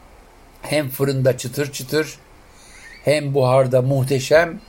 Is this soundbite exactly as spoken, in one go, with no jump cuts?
yes; 0 cuts

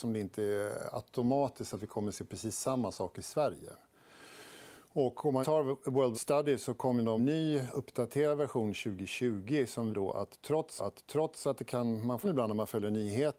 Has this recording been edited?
yes; 6 cuts; at 5.4 s, 6.1 s, 7.2 s, 9.9 s, 10.8 s, 12.2 s

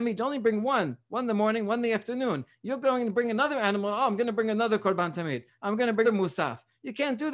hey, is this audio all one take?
no; 1 cut; at 6.0 s

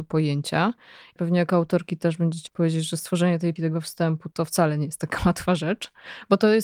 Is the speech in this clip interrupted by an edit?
yes; 3 cuts; at 1.2 s, 2.5 s, 3.6 s

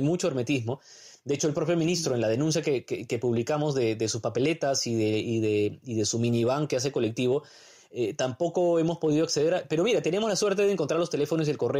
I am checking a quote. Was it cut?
no; 0 cuts

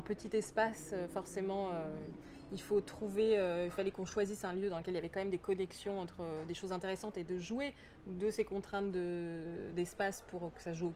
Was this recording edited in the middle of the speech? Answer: no; 0 cuts

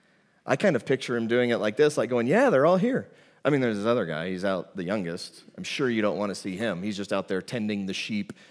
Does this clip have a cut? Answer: no; 0 cuts

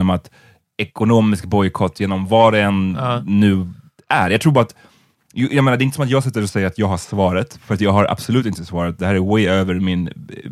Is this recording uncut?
yes; 0 cuts

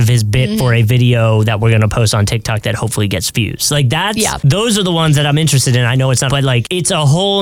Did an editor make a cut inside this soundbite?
yes; 1 cut; at 6.3 s

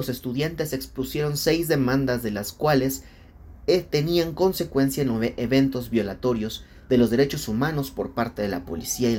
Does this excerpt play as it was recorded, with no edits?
yes; 0 cuts

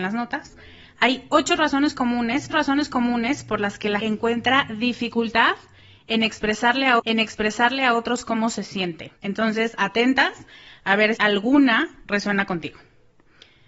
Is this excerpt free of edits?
no; 5 cuts; at 2.5 s, 4.0 s, 7.0 s, 9.2 s, 11.2 s

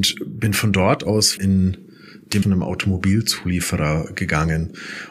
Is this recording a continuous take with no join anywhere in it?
no; 2 cuts; at 1.4 s, 2.4 s

